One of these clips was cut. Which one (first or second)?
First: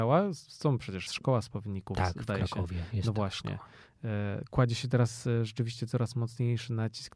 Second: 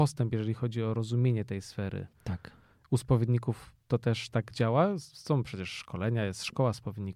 first